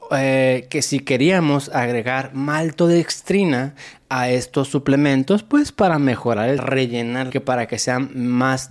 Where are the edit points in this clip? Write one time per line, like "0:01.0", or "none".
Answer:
0:06.6
0:07.3